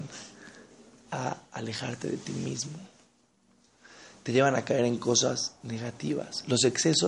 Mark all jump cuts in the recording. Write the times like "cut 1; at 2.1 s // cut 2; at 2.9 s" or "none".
none